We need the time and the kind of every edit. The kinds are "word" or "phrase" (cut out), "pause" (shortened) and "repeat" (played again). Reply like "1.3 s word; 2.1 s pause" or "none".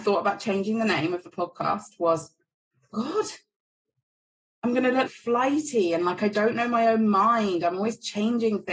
2.9 s word; 5.1 s word